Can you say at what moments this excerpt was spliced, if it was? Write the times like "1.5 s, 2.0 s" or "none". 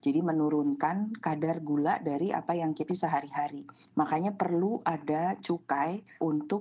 2.9 s